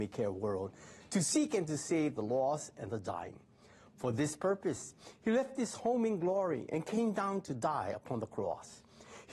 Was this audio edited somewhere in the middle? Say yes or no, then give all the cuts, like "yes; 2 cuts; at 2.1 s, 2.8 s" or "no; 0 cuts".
no; 0 cuts